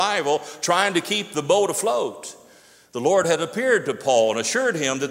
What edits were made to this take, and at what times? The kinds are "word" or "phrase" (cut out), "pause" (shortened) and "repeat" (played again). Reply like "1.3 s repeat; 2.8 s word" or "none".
none

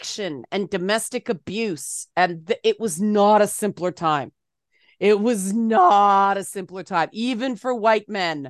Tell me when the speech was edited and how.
none

